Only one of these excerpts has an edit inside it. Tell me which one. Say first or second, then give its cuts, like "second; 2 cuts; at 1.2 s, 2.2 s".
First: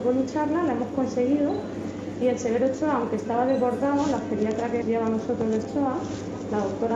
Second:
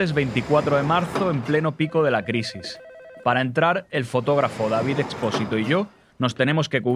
first; 2 cuts; at 4.8 s, 5.6 s